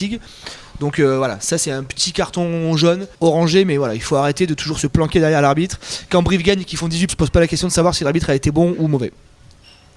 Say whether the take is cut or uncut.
cut